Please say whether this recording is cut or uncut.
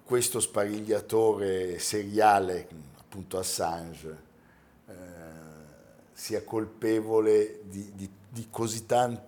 uncut